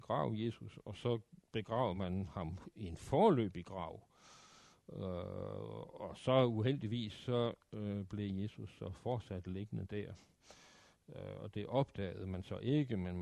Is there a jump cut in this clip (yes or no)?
no